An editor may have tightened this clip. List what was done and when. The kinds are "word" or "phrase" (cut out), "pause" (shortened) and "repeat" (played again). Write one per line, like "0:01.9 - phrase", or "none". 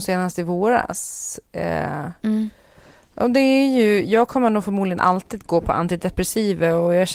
none